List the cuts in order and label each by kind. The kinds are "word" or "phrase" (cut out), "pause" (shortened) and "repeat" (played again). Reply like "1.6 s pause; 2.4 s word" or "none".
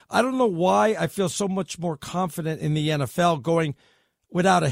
none